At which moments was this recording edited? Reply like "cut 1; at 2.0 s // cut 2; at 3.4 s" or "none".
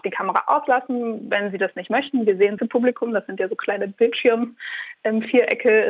cut 1; at 2.6 s